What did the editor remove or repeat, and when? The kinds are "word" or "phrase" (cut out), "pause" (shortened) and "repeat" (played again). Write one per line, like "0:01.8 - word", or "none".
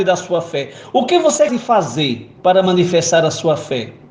0:01.5 - word
0:02.4 - pause